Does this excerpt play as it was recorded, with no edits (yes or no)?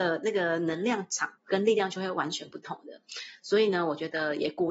no